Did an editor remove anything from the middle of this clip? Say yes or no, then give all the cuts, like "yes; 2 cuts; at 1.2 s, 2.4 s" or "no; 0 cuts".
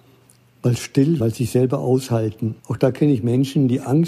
yes; 2 cuts; at 1.2 s, 2.6 s